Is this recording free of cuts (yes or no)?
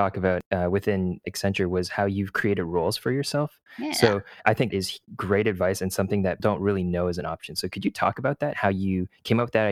no